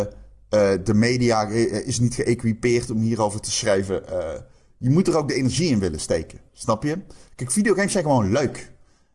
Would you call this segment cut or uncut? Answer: uncut